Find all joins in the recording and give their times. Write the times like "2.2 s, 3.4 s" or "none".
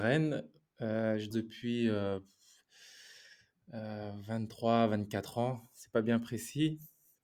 1.3 s